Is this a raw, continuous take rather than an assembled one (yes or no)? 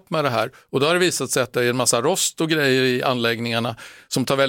yes